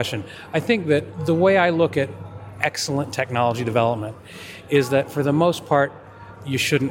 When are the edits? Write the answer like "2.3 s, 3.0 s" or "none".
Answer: none

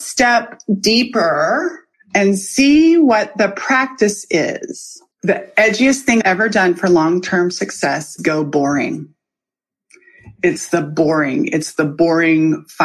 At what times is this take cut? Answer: 1.9 s, 5.1 s, 6.2 s, 8.2 s

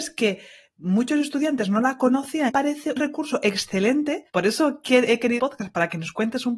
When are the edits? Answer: 2.5 s, 3.0 s, 4.3 s, 5.4 s

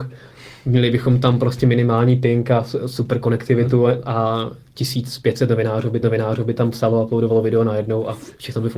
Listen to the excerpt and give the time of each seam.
6.0 s

